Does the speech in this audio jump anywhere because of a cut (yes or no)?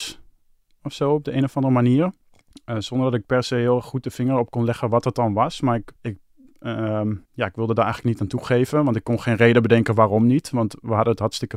yes